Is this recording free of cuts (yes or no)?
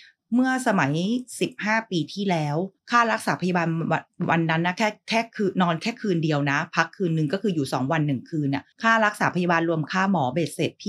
no